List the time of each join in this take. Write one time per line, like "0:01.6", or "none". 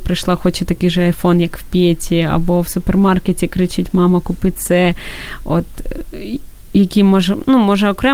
none